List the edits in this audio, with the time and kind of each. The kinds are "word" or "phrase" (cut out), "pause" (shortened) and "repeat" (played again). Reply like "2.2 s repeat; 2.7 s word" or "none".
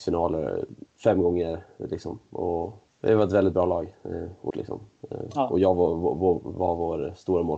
0.9 s pause; 2.9 s word; 4.5 s phrase